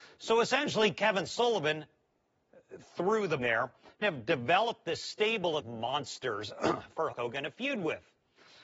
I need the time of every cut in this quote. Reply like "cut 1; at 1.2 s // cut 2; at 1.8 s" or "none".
cut 1; at 3.4 s // cut 2; at 4.0 s // cut 3; at 5.6 s // cut 4; at 7.1 s